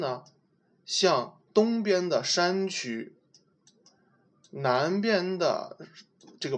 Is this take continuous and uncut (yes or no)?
yes